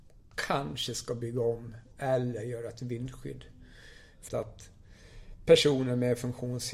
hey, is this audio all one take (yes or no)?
no